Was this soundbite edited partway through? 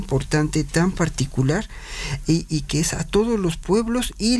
no; 0 cuts

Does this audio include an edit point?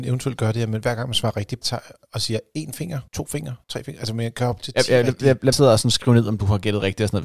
yes; 4 cuts; at 1.6 s, 3.1 s, 3.6 s, 5.5 s

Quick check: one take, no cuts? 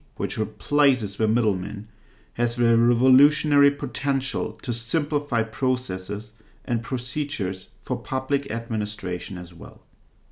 yes; 0 cuts

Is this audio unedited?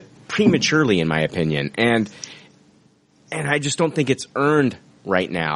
yes; 0 cuts

